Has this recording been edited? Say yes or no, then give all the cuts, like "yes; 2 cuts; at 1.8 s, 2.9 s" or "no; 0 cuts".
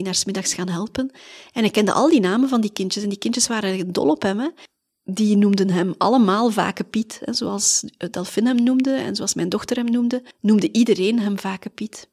no; 0 cuts